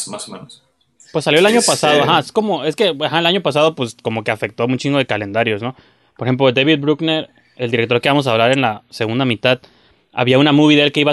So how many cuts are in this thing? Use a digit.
0